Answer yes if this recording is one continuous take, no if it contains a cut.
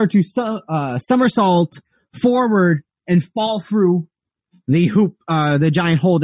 yes